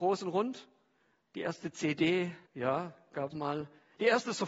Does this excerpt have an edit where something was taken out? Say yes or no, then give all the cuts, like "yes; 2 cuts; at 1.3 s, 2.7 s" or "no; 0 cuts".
yes; 2 cuts; at 2.5 s, 3.3 s